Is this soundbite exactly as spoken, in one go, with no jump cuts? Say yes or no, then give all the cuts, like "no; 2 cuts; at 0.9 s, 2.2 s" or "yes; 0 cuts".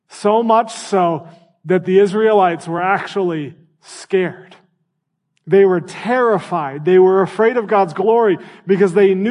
yes; 0 cuts